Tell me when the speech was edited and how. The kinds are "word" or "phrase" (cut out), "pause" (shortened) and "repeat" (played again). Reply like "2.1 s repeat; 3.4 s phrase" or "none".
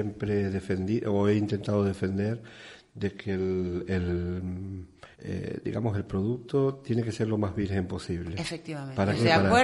5.1 s pause